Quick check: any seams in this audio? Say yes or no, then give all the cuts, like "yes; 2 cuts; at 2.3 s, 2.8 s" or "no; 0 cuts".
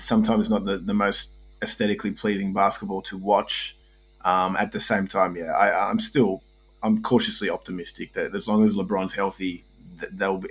no; 0 cuts